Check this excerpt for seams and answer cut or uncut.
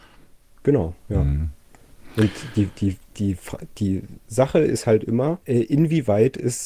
cut